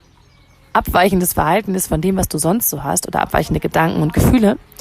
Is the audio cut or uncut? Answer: uncut